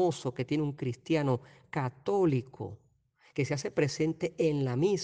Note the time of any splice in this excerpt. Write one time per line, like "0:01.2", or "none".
none